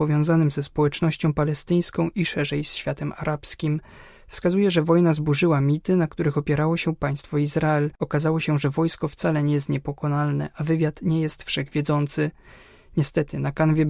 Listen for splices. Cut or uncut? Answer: uncut